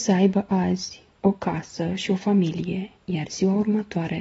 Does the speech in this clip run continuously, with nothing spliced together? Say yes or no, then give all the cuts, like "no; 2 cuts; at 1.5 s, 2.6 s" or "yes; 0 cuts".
no; 1 cut; at 3.0 s